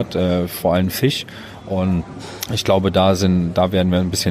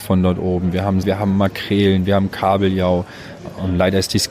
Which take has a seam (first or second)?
second